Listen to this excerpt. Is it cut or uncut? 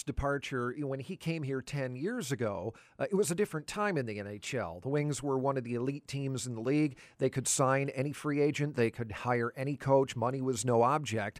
uncut